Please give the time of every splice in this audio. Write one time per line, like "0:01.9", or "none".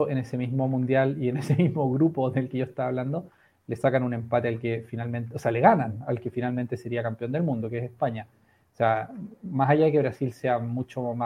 none

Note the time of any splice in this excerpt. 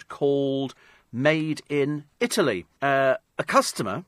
0:02.7

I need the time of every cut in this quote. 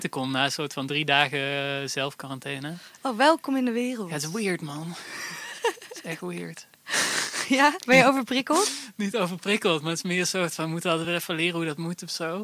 none

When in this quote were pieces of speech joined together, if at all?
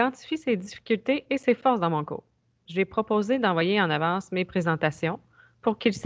none

